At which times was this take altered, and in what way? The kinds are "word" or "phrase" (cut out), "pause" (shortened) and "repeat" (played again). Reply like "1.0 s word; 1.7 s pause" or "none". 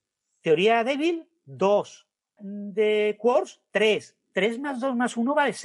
2.4 s word